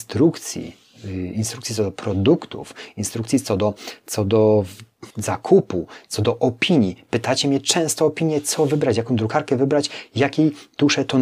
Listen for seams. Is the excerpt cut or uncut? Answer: cut